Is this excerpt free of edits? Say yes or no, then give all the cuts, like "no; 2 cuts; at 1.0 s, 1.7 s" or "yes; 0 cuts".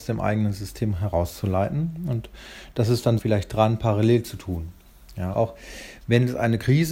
no; 2 cuts; at 3.2 s, 5.3 s